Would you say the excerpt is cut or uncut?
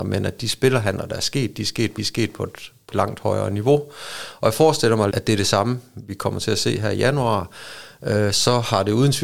cut